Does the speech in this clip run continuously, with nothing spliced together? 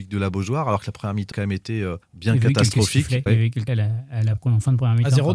no; 4 cuts; at 1.3 s, 2.0 s, 3.3 s, 3.7 s

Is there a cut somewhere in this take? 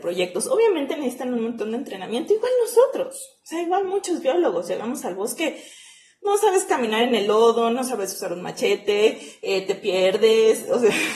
no; 0 cuts

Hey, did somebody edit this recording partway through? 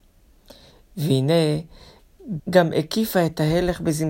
yes; 1 cut; at 2.4 s

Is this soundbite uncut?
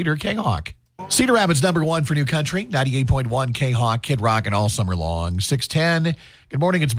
yes; 0 cuts

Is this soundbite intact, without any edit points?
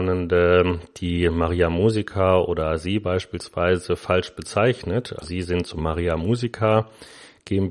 no; 2 cuts; at 5.2 s, 5.8 s

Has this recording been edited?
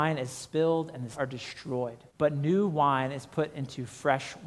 yes; 2 cuts; at 1.1 s, 2.1 s

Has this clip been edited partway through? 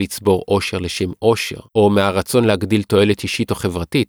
yes; 1 cut; at 1.7 s

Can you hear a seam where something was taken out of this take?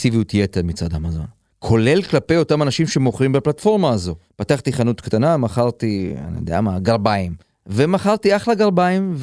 yes; 1 cut; at 7.4 s

